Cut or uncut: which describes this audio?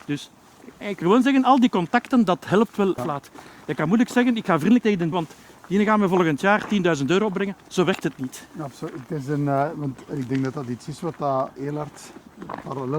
cut